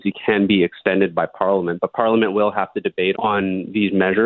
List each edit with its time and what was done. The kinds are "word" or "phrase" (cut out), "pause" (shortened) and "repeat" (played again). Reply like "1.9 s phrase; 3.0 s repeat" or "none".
3.1 s word